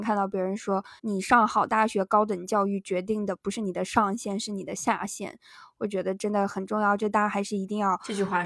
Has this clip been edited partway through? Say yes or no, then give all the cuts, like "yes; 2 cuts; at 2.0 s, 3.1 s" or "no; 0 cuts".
yes; 1 cut; at 1.0 s